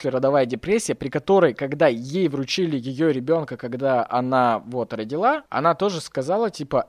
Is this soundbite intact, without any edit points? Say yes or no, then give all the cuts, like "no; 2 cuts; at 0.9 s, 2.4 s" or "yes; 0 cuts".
no; 1 cut; at 5.5 s